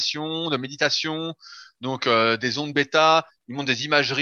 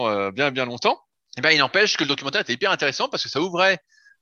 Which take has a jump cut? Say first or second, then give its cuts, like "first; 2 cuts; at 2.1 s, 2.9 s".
second; 1 cut; at 1.2 s